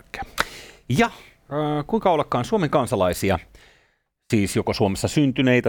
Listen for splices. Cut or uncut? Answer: uncut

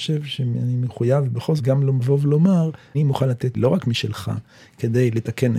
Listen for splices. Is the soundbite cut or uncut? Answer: cut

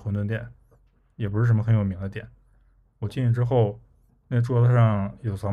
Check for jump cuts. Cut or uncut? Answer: uncut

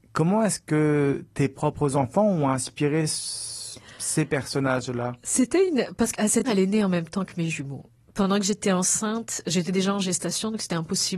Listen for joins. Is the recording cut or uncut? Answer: cut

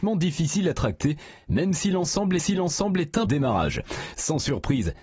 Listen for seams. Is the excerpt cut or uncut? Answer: cut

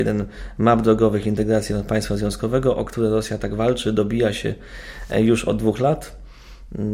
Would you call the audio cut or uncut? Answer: uncut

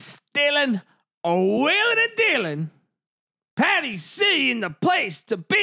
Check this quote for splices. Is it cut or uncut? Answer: uncut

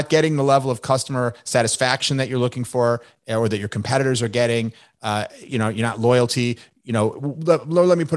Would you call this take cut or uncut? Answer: uncut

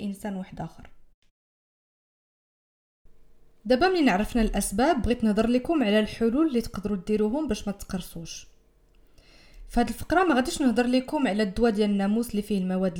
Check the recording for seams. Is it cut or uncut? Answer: uncut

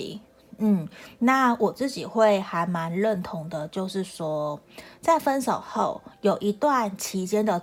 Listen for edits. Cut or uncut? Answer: uncut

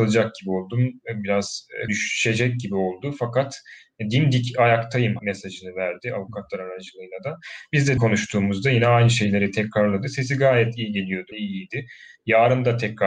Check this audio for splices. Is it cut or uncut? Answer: cut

